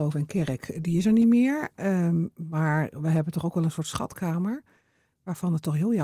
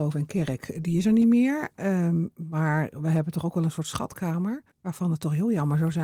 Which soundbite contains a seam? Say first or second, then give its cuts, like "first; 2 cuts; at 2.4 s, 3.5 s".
second; 1 cut; at 4.7 s